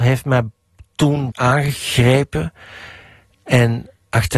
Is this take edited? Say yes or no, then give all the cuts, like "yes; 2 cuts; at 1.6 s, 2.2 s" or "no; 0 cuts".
yes; 1 cut; at 1.3 s